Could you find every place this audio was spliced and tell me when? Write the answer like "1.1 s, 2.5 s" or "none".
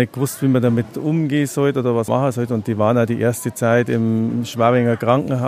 2.1 s